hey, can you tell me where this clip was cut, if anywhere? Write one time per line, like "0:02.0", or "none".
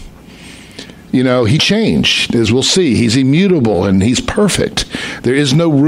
0:01.6

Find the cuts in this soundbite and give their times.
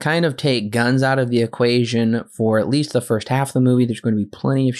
none

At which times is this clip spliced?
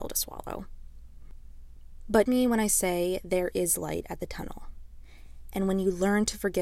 0:02.3
0:04.2

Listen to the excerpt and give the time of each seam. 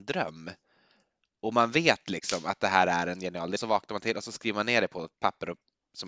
0:03.6

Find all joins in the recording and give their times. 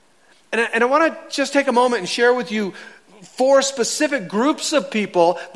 none

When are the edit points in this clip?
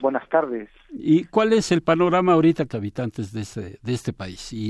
0:02.7

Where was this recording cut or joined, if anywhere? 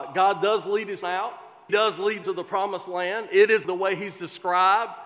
0:01.0
0:01.7
0:02.2
0:03.6

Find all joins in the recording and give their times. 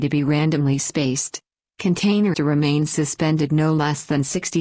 0:02.3

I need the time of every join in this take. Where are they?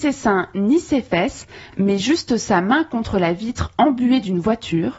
none

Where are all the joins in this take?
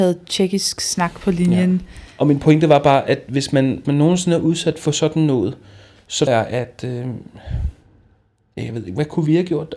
0:03.8
0:06.3

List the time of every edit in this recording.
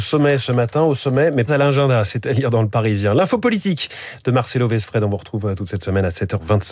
0:01.5

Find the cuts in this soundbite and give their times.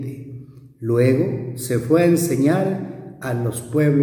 none

